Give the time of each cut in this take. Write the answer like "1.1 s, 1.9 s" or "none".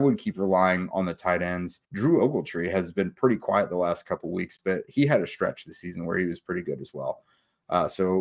1.8 s